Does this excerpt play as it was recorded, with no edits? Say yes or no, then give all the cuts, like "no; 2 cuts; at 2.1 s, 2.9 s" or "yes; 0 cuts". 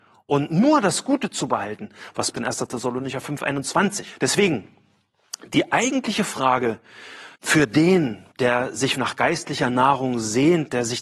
no; 4 cuts; at 2.3 s, 7.3 s, 8.3 s, 8.9 s